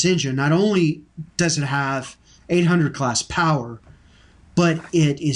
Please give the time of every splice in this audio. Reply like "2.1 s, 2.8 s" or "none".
none